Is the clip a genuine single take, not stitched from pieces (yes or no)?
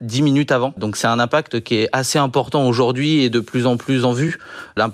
no